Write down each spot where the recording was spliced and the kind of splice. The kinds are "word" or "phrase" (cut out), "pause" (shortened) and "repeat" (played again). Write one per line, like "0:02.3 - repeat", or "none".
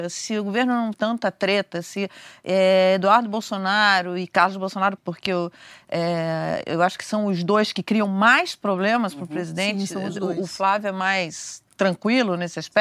0:00.9 - word
0:05.0 - word